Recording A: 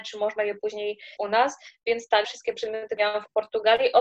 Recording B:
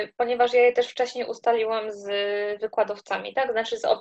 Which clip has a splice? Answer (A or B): A